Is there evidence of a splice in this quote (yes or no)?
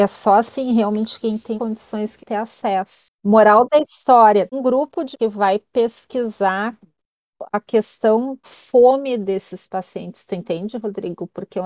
yes